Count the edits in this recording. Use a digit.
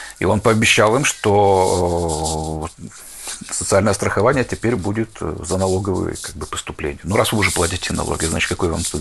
0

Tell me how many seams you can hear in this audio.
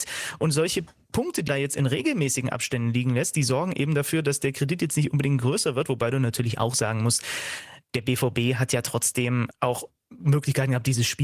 2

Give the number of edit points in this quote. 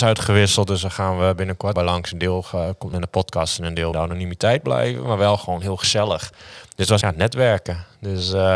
4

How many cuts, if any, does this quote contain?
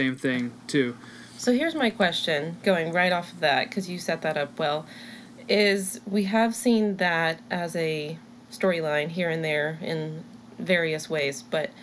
0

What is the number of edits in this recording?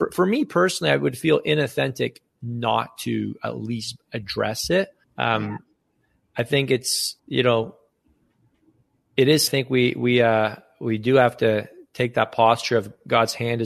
3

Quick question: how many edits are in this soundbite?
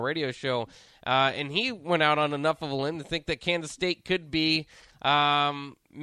0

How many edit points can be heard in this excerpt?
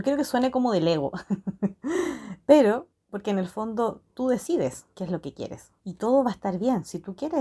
2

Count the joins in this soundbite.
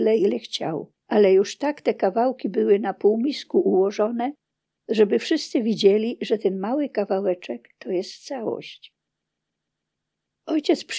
1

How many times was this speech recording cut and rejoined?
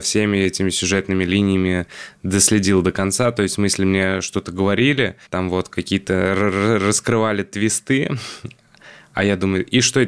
1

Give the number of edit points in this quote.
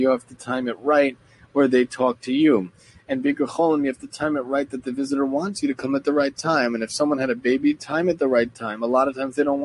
0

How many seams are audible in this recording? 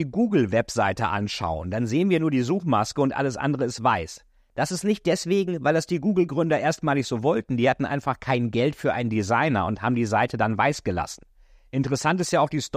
0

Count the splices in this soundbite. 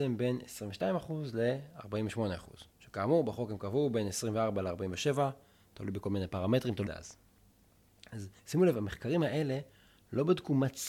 3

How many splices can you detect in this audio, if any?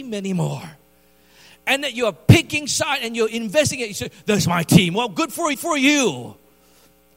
1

